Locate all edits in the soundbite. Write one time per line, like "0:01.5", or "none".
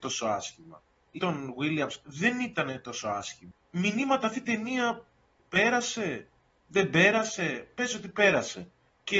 0:01.2